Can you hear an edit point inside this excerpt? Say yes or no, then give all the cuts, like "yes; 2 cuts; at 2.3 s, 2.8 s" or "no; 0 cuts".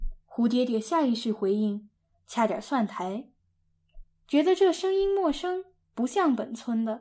no; 0 cuts